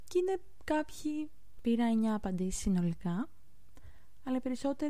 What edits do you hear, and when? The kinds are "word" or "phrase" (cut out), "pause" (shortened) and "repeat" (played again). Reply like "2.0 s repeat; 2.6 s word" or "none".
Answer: 1.6 s phrase